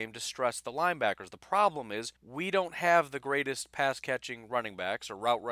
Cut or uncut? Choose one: cut